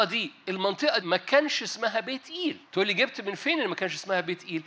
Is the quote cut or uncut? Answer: cut